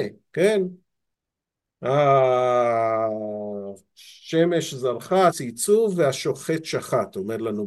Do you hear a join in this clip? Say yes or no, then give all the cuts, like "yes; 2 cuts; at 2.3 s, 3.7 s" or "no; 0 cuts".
yes; 1 cut; at 5.3 s